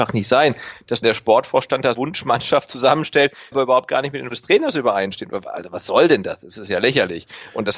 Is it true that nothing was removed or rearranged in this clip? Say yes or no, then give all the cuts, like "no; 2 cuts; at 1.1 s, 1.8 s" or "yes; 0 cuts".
no; 4 cuts; at 1.0 s, 1.9 s, 3.5 s, 4.3 s